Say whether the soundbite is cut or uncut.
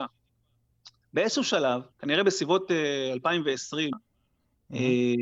cut